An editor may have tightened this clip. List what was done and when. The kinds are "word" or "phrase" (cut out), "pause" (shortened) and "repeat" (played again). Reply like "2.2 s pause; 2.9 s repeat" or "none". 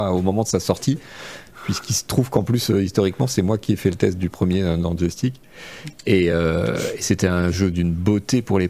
none